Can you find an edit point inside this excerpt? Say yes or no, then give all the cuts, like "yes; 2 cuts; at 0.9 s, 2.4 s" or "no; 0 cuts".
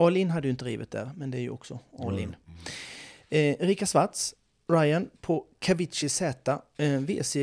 no; 0 cuts